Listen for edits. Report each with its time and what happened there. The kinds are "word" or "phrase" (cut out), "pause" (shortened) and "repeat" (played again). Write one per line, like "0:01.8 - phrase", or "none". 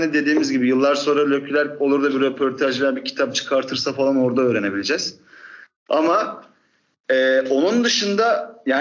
none

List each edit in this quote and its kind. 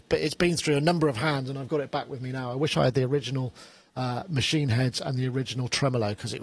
none

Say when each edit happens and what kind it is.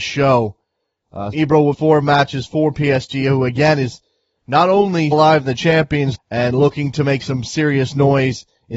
0:01.3 - word
0:01.7 - word
0:05.1 - word
0:06.1 - word

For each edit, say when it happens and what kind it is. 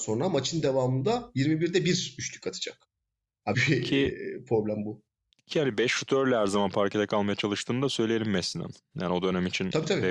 0:03.5 - word

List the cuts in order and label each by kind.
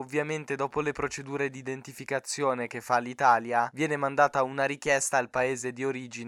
none

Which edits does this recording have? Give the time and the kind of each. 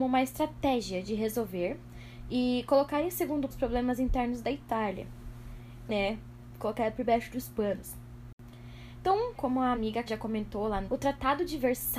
0:03.5 - word
0:05.9 - word
0:09.3 - word
0:09.7 - word
0:10.1 - word
0:10.8 - word

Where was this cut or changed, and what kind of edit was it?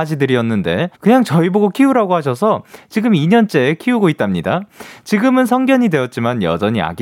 0:00.9 - pause

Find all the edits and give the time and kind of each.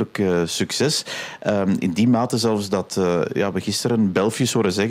none

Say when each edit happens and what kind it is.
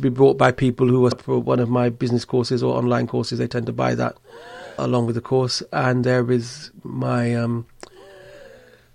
0:01.1 - word
0:04.8 - word
0:06.0 - word

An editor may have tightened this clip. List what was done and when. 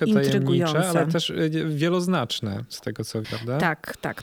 0:03.2 - word

